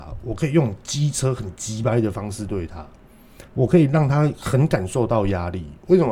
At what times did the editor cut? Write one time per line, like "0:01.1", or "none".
0:03.5